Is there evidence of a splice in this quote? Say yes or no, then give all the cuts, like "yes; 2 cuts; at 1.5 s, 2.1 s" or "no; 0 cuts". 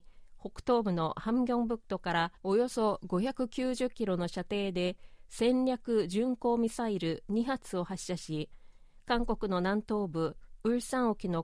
yes; 1 cut; at 2.4 s